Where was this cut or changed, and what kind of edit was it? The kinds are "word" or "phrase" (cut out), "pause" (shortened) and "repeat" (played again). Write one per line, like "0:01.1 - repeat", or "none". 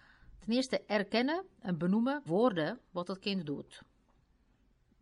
0:02.3 - word